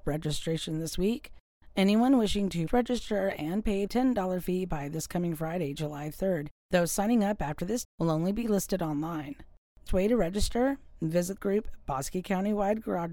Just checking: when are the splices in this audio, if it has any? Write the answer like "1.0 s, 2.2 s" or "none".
2.7 s, 3.9 s, 6.6 s, 7.8 s, 9.9 s, 11.4 s